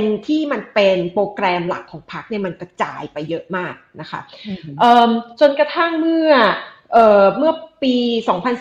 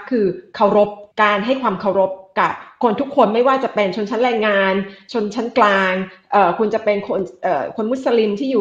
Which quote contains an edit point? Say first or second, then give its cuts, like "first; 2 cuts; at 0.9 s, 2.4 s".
second; 1 cut; at 1.1 s